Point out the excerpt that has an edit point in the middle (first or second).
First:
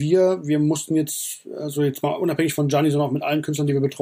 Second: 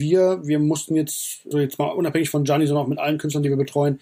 second